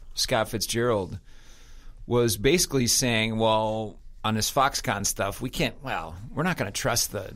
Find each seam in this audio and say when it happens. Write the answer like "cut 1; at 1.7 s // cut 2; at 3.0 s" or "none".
none